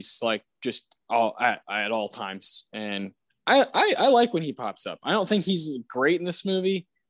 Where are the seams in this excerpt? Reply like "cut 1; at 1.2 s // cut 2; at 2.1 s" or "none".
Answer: cut 1; at 3.3 s

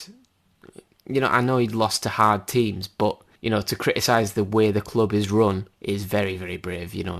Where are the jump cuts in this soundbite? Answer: cut 1; at 3.4 s // cut 2; at 5.7 s

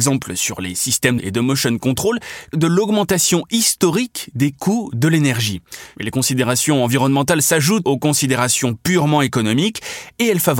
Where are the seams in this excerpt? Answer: cut 1; at 1.2 s // cut 2; at 2.5 s // cut 3; at 7.8 s

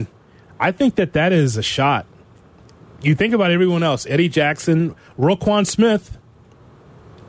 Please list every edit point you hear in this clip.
none

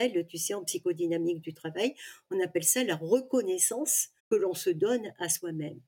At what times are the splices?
cut 1; at 4.2 s

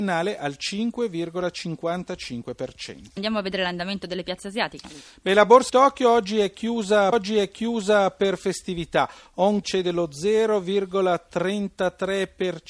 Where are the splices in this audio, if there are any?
cut 1; at 3.2 s // cut 2; at 5.7 s // cut 3; at 7.1 s // cut 4; at 9.6 s

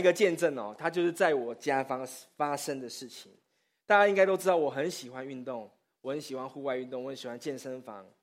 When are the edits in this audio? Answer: none

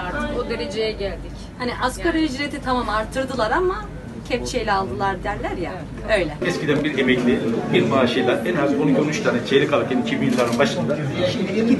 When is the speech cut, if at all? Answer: none

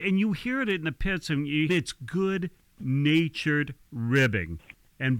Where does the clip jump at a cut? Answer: cut 1; at 1.7 s

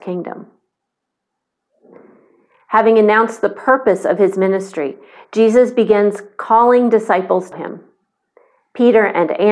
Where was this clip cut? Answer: cut 1; at 7.5 s

